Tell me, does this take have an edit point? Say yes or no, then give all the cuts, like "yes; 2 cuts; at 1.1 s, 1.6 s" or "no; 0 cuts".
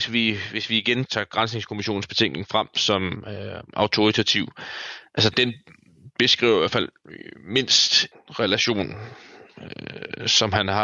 yes; 3 cuts; at 1.1 s, 5.3 s, 8.1 s